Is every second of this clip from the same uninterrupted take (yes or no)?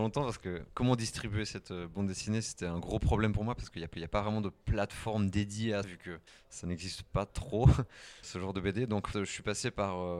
no